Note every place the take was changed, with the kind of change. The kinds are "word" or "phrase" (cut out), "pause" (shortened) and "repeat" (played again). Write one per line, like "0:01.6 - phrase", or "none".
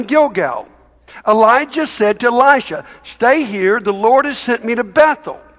none

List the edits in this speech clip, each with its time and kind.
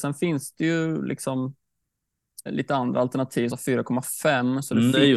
0:02.5 - word
0:03.5 - word

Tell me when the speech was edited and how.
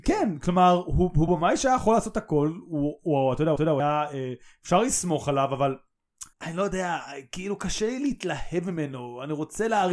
0:01.3 - word
0:03.6 - repeat
0:06.3 - pause

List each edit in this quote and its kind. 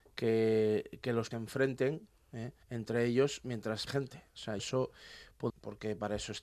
0:01.3 - word
0:02.6 - pause
0:03.9 - word
0:04.6 - word
0:05.5 - phrase

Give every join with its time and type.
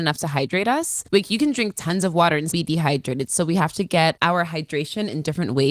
0:01.1 - pause
0:02.5 - word

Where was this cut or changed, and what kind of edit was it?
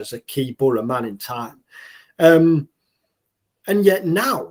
none

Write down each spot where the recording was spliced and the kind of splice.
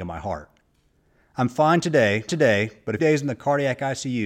0:02.3 - repeat
0:03.0 - word

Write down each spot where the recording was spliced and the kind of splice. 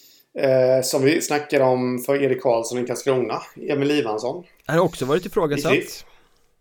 none

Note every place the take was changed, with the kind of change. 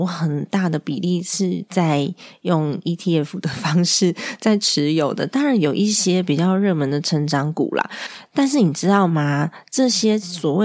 none

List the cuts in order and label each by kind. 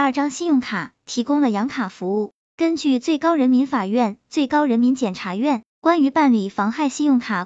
0:05.7 - pause

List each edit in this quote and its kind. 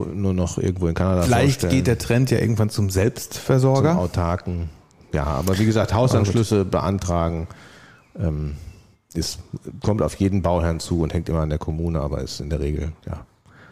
none

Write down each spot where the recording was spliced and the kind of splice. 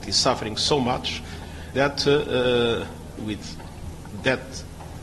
0:01.7 - word
0:03.2 - word

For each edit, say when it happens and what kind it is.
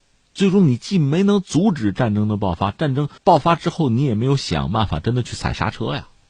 0:03.2 - pause

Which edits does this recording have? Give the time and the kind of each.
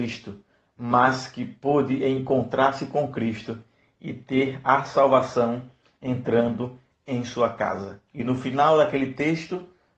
0:08.1 - pause

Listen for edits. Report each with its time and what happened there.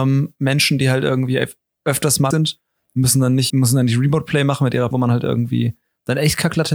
0:02.3 - word
0:03.5 - word
0:04.9 - word

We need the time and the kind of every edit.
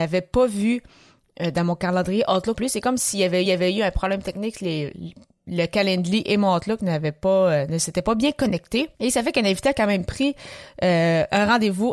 0:02.5 - word
0:03.5 - repeat
0:08.9 - pause

